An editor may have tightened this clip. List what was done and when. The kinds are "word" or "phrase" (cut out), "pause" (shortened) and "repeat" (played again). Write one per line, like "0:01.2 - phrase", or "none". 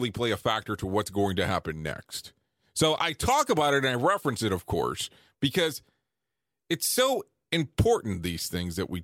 none

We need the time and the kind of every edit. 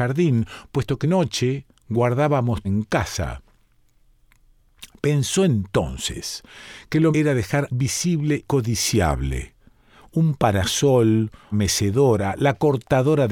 0:01.0 - word
0:02.6 - word
0:07.1 - word
0:07.7 - word
0:08.4 - word
0:11.5 - word

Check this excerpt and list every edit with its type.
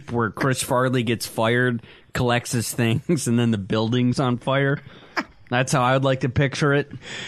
0:04.1 - word

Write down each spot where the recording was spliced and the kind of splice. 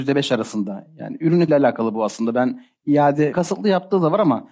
0:01.5 - word
0:03.3 - word

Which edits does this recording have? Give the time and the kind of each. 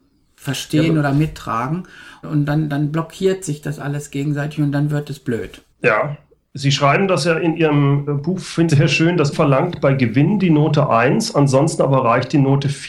0:02.2 - word
0:05.7 - pause
0:08.1 - word
0:08.7 - word
0:09.3 - word

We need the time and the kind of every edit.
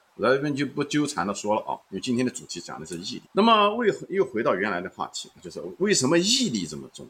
0:01.8 - pause
0:03.3 - pause

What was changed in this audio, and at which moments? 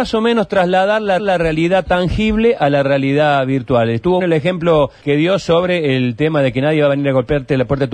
0:01.2 - repeat
0:04.2 - word
0:05.0 - word

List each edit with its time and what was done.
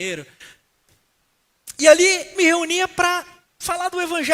0:02.3 - word

